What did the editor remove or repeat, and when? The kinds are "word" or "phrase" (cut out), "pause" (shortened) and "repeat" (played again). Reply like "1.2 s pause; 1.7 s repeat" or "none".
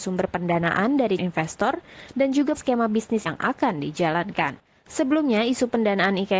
1.2 s word; 2.5 s word; 3.3 s word

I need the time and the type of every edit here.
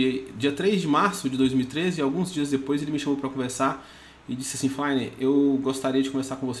none

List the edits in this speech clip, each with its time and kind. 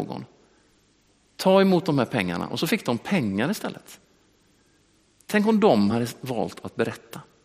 none

